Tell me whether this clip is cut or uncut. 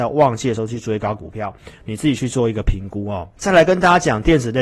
cut